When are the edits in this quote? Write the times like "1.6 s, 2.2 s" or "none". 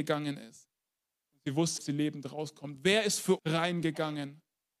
1.0 s, 1.8 s, 3.4 s